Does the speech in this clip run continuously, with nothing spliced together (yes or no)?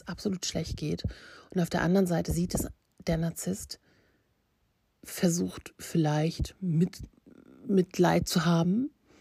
yes